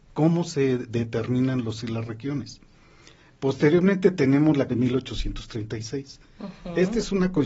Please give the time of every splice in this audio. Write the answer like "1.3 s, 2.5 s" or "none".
1.8 s, 4.7 s